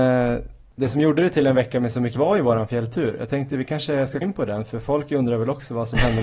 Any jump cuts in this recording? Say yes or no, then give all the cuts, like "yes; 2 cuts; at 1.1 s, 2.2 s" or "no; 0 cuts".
yes; 2 cuts; at 2.2 s, 4.2 s